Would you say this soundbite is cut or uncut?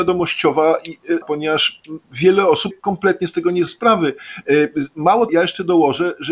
cut